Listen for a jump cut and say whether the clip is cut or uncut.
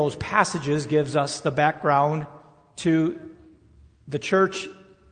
uncut